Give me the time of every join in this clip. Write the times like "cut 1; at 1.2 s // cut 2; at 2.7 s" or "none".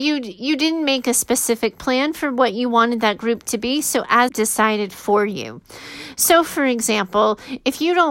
cut 1; at 4.3 s